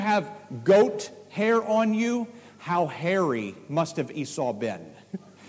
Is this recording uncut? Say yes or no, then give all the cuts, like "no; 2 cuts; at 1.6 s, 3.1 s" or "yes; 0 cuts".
yes; 0 cuts